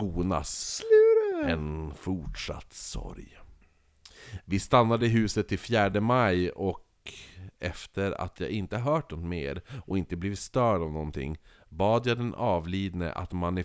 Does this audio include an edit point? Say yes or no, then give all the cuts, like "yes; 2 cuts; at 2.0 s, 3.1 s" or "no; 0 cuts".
no; 0 cuts